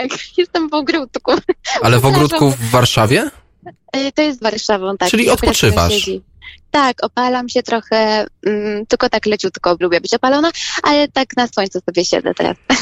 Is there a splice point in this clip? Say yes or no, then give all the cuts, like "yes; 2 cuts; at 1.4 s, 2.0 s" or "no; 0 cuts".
yes; 3 cuts; at 4.4 s, 5.0 s, 9.8 s